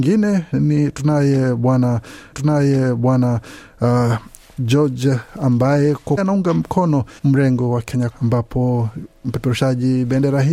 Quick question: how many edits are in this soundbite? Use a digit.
4